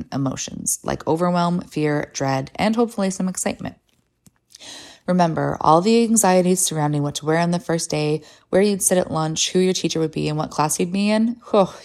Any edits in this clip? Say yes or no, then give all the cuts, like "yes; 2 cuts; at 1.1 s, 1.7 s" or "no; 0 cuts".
no; 0 cuts